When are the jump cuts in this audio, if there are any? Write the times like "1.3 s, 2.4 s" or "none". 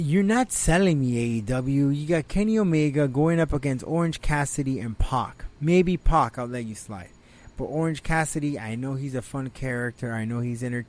5.5 s